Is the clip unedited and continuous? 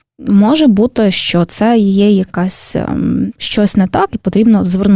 no; 1 cut; at 3.3 s

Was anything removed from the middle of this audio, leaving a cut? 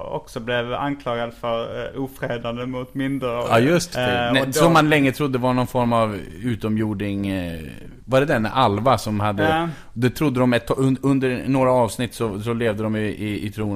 yes; 1 cut; at 3.9 s

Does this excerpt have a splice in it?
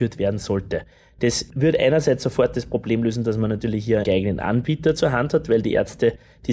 yes; 1 cut; at 4.0 s

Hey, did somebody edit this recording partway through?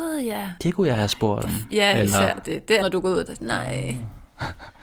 yes; 3 cuts; at 1.4 s, 2.8 s, 3.3 s

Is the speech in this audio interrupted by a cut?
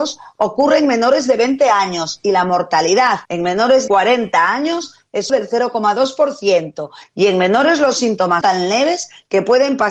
yes; 4 cuts; at 3.2 s, 3.9 s, 5.3 s, 8.4 s

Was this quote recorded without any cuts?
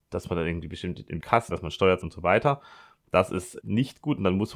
no; 4 cuts; at 1.2 s, 1.5 s, 2.0 s, 3.6 s

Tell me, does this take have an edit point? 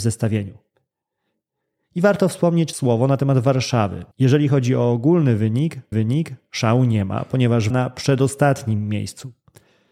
yes; 4 cuts; at 2.7 s, 4.1 s, 5.9 s, 7.7 s

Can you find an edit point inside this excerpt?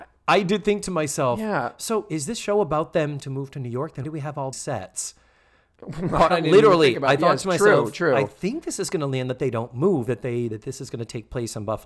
yes; 4 cuts; at 3.2 s, 4.0 s, 4.5 s, 6.3 s

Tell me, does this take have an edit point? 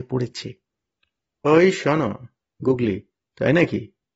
yes; 2 cuts; at 1.4 s, 2.4 s

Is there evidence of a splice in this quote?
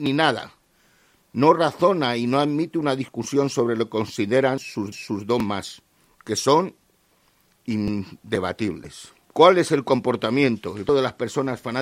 yes; 3 cuts; at 4.9 s, 9.2 s, 10.9 s

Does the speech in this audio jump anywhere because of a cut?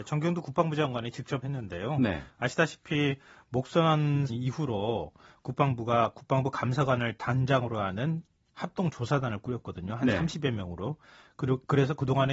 yes; 2 cuts; at 1.4 s, 4.3 s

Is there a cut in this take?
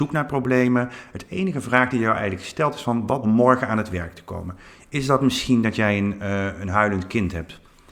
yes; 1 cut; at 3.2 s

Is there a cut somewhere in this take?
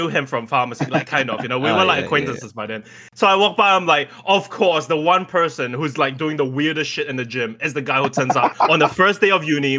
no; 0 cuts

